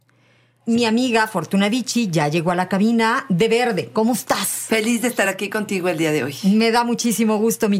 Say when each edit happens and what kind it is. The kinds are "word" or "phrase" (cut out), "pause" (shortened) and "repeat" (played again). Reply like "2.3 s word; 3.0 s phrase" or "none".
none